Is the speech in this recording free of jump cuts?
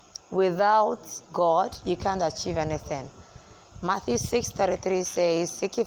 yes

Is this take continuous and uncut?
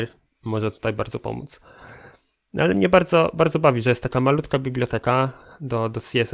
yes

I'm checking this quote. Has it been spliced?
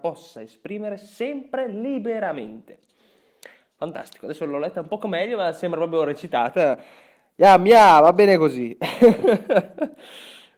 no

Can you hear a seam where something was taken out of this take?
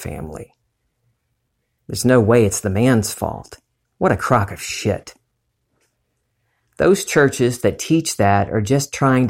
no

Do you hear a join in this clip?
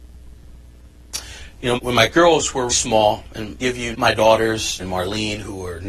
yes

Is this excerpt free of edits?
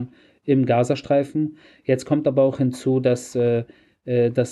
yes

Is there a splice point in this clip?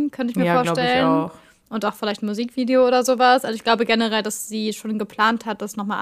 no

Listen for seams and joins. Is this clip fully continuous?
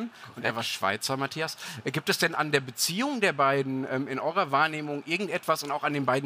yes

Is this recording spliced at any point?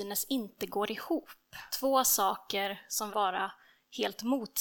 yes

